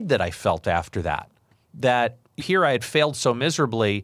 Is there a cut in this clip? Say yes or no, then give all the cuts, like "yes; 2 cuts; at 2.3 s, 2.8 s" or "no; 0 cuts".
yes; 1 cut; at 2.4 s